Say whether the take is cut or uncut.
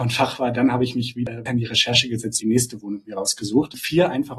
cut